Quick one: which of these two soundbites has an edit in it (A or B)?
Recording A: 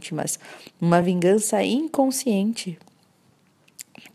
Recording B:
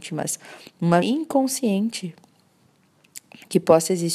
B